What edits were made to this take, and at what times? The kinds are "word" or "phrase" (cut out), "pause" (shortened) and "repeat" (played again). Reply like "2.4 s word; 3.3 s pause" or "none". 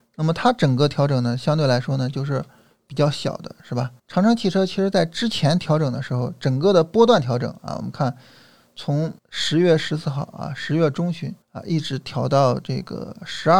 4.0 s pause; 9.2 s pause; 11.4 s pause